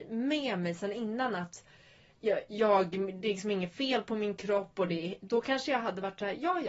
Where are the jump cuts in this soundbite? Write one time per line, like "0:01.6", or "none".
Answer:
none